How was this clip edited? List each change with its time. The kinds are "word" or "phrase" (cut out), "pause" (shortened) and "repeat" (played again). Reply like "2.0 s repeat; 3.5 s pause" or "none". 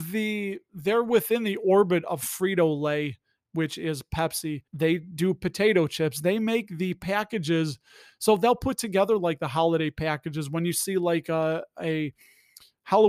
4.7 s pause